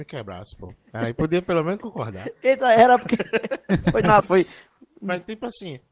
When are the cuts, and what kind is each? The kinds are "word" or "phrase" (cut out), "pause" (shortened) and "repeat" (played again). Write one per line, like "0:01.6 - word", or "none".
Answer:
0:04.2 - word